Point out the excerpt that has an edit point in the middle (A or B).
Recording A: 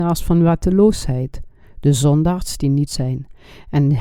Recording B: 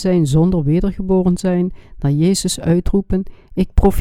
A